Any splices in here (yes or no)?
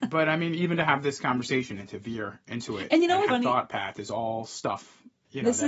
yes